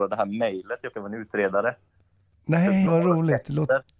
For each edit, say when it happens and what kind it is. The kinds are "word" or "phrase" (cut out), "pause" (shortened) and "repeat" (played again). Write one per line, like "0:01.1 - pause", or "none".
0:00.9 - word
0:02.9 - word